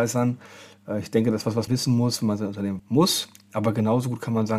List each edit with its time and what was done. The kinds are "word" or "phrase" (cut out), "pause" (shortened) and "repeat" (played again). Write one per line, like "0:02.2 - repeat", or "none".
0:01.7 - word
0:02.8 - word